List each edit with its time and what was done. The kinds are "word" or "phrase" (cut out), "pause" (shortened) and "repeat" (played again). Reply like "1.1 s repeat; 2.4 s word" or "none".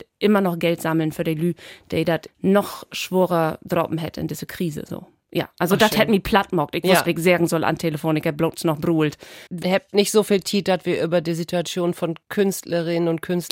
2.3 s word; 7.1 s phrase; 9.5 s pause